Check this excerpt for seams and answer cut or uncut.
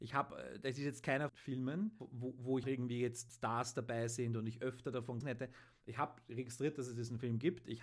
cut